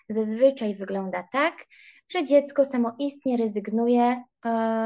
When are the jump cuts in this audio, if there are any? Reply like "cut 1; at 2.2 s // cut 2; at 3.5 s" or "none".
none